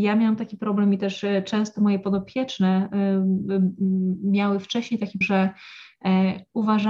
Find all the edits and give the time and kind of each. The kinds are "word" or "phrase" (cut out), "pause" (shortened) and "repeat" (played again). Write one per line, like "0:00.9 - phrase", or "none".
0:05.2 - word

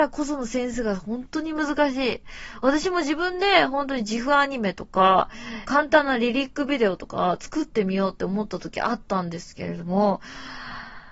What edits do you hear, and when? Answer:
0:05.7 - phrase

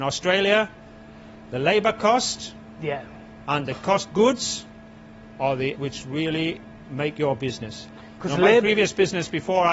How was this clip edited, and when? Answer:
0:04.1 - word
0:05.7 - word
0:06.8 - word

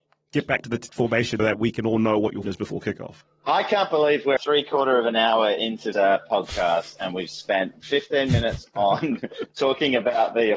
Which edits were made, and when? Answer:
0:01.4 - word
0:02.4 - word
0:03.2 - pause
0:04.4 - word
0:05.9 - word

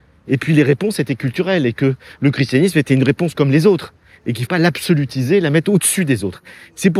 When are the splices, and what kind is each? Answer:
0:03.3 - word
0:04.5 - word

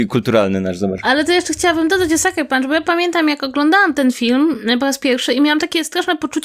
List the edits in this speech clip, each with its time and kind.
none

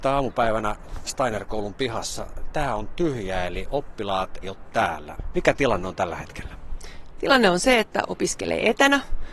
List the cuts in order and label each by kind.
0:01.1 - word
0:04.4 - word
0:08.0 - word

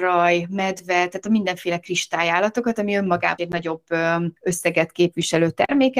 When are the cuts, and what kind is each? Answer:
0:03.4 - word
0:04.4 - pause

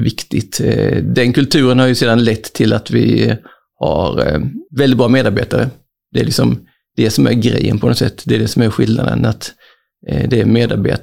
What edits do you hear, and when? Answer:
0:04.7 - pause

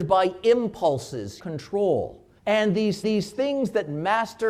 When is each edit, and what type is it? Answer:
0:01.4 - phrase
0:02.4 - pause
0:03.0 - repeat

